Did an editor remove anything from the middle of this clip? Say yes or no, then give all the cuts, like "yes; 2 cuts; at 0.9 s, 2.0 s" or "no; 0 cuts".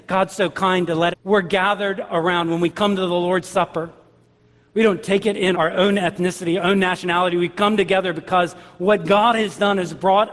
yes; 2 cuts; at 1.1 s, 5.5 s